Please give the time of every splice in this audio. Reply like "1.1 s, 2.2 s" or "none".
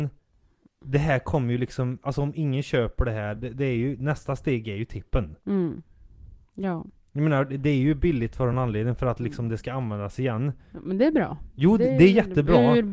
none